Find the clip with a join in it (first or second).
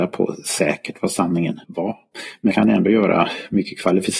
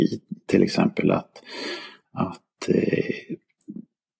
first